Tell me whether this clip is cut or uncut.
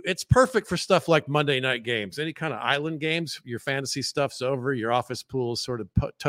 uncut